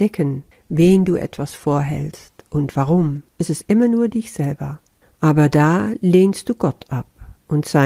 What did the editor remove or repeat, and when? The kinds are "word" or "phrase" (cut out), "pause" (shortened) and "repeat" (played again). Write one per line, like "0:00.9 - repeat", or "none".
0:03.3 - pause
0:05.0 - pause